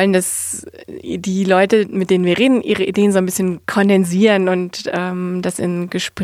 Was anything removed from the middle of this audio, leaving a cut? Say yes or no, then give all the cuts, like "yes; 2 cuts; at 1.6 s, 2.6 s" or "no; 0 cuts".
yes; 1 cut; at 3.6 s